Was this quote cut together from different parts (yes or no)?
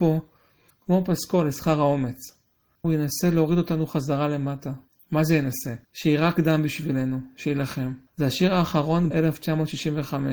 yes